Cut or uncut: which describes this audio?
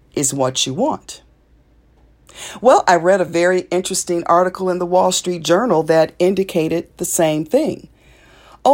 uncut